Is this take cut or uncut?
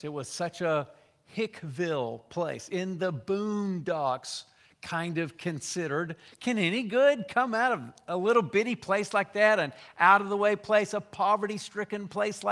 uncut